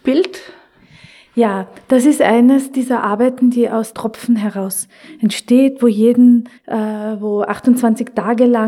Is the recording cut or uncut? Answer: cut